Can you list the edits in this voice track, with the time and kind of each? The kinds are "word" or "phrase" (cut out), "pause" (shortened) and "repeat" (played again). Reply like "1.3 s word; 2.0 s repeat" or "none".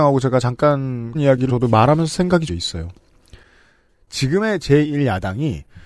1.1 s word; 1.5 s word; 2.5 s word